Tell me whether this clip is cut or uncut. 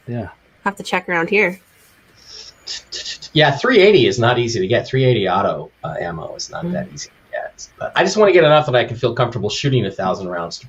cut